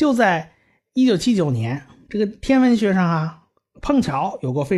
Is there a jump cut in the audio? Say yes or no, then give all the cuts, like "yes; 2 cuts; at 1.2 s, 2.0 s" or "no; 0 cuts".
no; 0 cuts